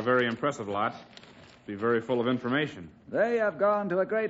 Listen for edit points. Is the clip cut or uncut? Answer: cut